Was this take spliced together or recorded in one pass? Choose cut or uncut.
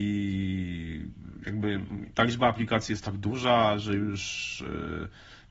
uncut